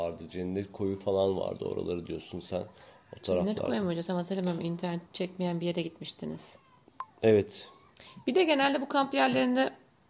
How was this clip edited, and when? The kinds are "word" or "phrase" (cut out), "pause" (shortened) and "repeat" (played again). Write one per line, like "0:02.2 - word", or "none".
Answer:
0:05.1 - pause
0:07.1 - pause